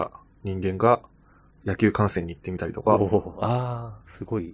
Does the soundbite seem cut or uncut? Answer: uncut